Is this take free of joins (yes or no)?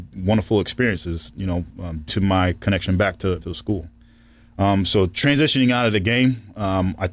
no